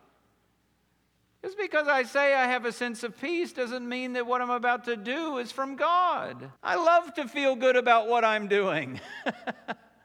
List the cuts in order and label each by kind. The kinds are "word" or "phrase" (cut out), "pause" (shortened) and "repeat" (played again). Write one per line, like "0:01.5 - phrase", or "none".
0:06.6 - pause